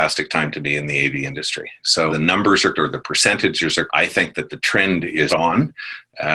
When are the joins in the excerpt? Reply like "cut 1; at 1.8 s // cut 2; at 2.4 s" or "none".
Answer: cut 1; at 2.1 s // cut 2; at 2.7 s // cut 3; at 3.9 s // cut 4; at 5.3 s